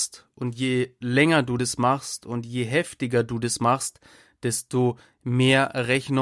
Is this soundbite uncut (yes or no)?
yes